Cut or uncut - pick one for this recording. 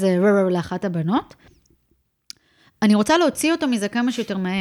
uncut